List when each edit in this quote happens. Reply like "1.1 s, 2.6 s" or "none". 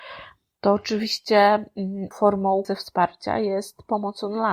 2.1 s, 2.6 s